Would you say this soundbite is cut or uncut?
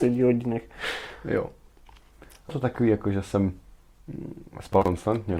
cut